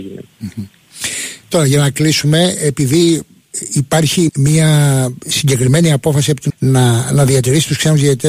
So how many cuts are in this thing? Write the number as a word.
two